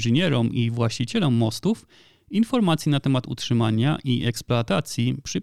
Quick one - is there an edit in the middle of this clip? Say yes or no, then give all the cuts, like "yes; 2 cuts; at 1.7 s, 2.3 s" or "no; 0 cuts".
no; 0 cuts